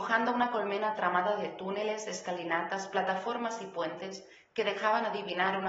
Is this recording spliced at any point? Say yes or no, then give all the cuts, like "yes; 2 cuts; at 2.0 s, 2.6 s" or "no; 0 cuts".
no; 0 cuts